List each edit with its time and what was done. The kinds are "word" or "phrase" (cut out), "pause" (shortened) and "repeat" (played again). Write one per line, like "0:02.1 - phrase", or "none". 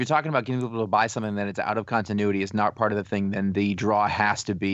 none